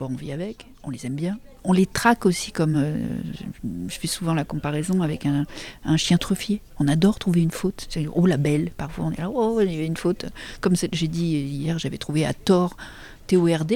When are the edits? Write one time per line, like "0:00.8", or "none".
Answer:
none